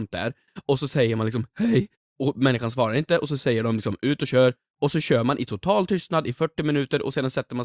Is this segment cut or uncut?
uncut